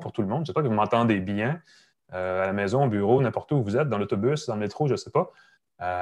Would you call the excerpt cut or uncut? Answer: uncut